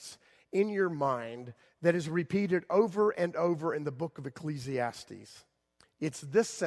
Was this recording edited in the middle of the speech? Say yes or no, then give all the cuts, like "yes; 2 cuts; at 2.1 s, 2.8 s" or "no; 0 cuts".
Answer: no; 0 cuts